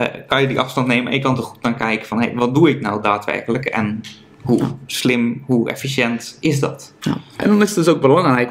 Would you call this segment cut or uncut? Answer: uncut